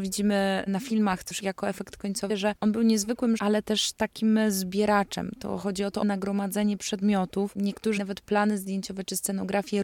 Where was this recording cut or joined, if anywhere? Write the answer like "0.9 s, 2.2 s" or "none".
1.3 s, 2.3 s, 3.4 s, 6.0 s, 8.0 s